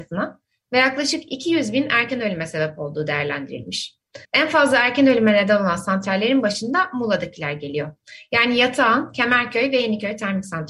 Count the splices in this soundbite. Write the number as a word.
one